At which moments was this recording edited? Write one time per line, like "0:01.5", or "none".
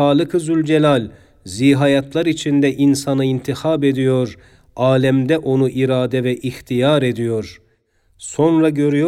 none